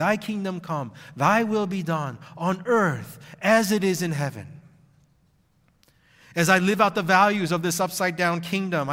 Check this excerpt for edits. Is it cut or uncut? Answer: uncut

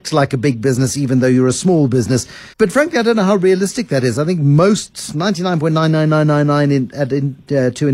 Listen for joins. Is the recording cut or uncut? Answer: cut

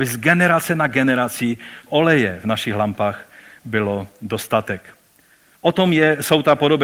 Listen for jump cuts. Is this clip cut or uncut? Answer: cut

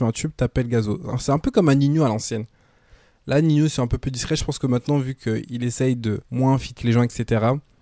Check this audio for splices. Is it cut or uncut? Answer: cut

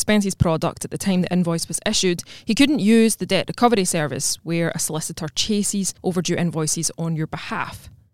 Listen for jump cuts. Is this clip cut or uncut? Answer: cut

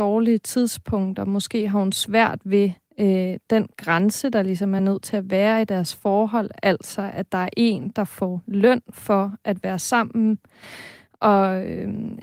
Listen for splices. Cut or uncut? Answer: uncut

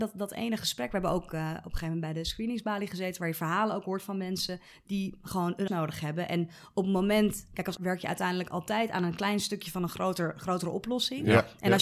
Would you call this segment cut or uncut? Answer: cut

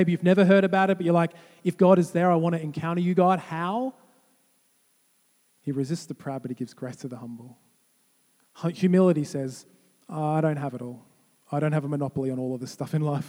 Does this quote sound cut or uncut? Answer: uncut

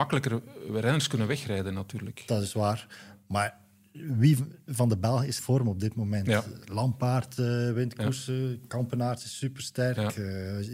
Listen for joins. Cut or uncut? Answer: cut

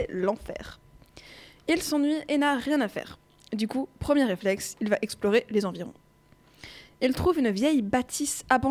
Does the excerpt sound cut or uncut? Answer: uncut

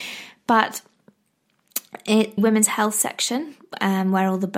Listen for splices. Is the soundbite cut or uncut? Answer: cut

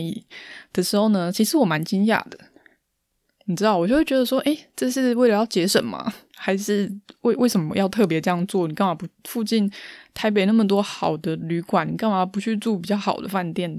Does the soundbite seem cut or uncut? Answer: uncut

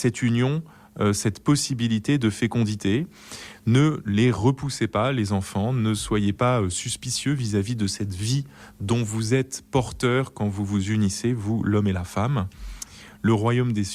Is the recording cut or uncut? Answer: uncut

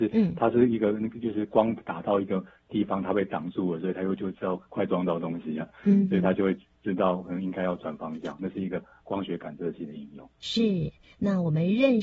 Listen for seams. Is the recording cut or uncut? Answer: uncut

